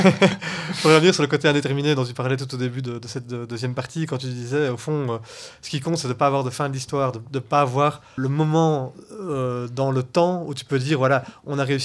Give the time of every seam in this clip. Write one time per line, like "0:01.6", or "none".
0:08.2